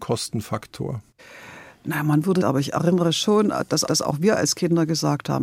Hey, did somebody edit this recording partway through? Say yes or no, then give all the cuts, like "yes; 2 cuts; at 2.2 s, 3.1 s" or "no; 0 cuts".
yes; 2 cuts; at 2.4 s, 3.9 s